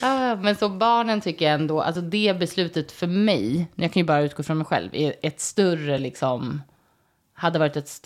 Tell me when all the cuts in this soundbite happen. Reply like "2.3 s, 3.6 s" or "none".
none